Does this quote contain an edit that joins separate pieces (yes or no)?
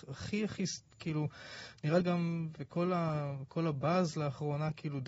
yes